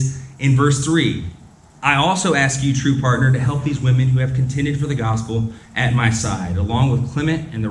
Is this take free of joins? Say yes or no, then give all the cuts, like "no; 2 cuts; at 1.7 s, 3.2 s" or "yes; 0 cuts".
yes; 0 cuts